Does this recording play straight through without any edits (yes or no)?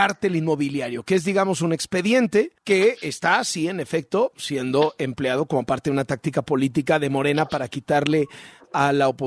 no